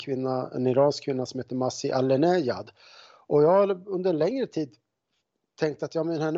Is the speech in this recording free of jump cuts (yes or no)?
yes